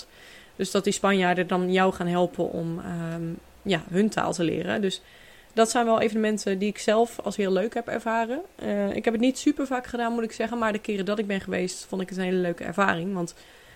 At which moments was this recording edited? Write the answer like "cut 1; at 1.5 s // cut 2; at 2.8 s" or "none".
none